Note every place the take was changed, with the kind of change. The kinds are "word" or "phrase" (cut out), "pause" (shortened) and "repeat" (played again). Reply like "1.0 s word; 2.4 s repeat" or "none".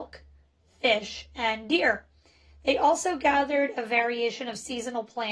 none